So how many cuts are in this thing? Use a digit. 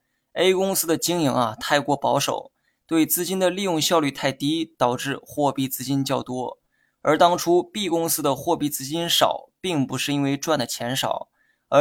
0